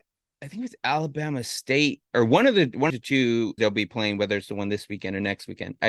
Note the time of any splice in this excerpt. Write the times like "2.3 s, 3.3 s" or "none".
2.9 s, 3.6 s

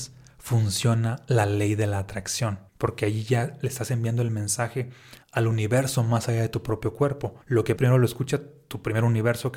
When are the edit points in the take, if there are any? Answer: 2.7 s, 5.2 s, 7.4 s, 7.8 s

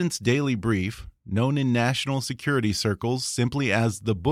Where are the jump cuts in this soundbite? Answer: none

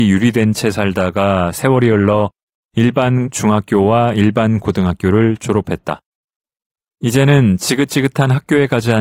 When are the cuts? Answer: none

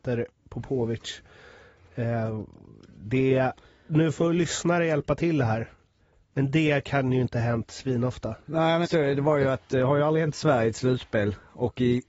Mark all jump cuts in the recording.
8.4 s, 8.8 s

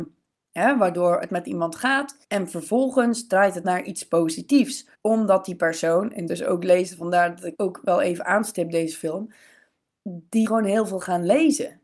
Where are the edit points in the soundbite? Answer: 1.3 s, 2.2 s, 3.6 s, 4.9 s, 6.3 s, 7.5 s, 10.4 s

